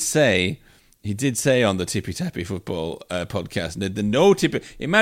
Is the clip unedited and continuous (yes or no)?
yes